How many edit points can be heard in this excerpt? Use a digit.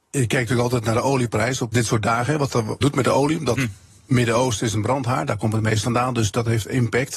4